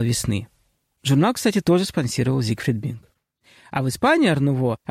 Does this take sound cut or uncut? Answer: uncut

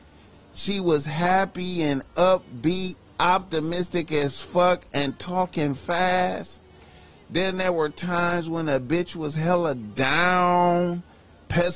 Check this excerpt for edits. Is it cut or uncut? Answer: uncut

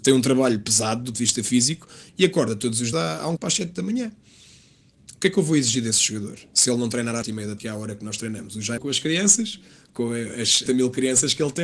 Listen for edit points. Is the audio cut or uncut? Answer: cut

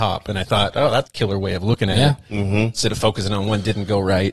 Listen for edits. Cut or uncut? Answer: cut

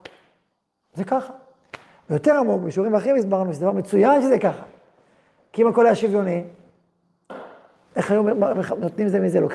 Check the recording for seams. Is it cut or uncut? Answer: uncut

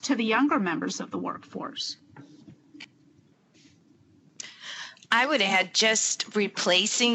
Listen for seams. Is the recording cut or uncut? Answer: uncut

